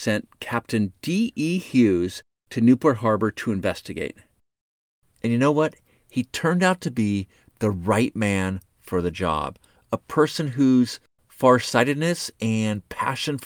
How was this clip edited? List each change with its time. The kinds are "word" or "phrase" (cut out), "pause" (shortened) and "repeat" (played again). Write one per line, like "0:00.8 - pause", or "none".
none